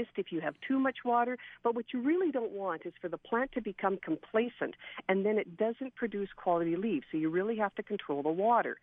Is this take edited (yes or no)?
no